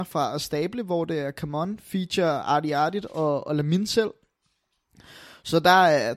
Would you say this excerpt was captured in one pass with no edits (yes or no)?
yes